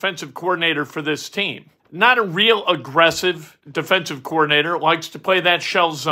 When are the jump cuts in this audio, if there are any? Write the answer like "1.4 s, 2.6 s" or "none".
1.8 s, 3.6 s